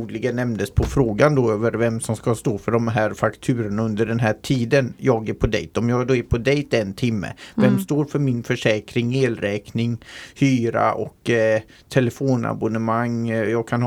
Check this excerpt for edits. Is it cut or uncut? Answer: uncut